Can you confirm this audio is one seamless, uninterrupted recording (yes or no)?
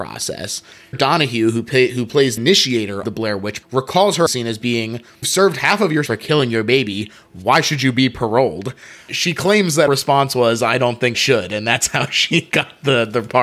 no